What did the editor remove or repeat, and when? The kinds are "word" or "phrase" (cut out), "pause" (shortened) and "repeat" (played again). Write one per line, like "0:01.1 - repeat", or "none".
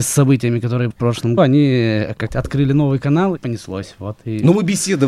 0:00.9 - word
0:01.4 - word
0:02.3 - word
0:03.4 - word